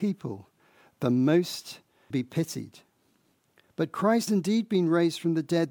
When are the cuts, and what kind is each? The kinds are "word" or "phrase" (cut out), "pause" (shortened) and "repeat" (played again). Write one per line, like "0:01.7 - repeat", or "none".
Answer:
0:02.1 - word
0:04.3 - word